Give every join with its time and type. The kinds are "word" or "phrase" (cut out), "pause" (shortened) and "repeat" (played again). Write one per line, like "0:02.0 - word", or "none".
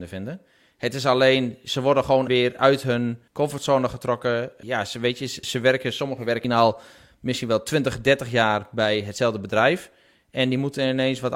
0:02.3 - word
0:03.3 - pause
0:04.6 - word
0:05.4 - word
0:06.4 - word

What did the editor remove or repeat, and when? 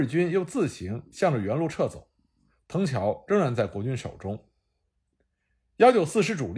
none

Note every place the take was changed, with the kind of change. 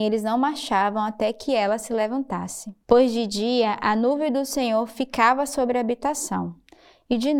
0:02.8 - pause

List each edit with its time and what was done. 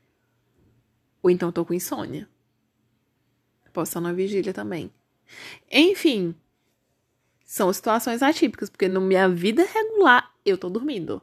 none

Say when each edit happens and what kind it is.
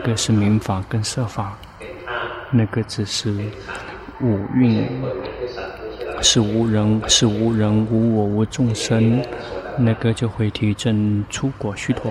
0:07.0 - repeat

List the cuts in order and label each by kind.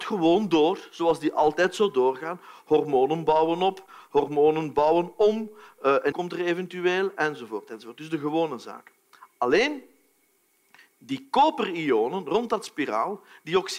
0:06.1 - word

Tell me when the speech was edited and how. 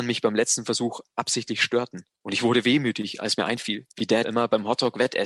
0:02.1 - pause
0:03.9 - pause
0:04.2 - word

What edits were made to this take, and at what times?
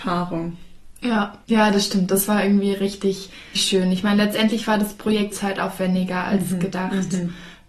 0:01.4 - pause
0:03.5 - word
0:05.3 - phrase

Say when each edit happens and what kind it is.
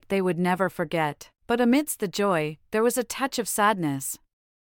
0:01.4 - pause

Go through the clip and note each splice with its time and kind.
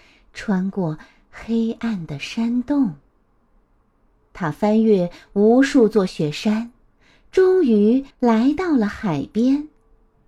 0:08.1 - pause

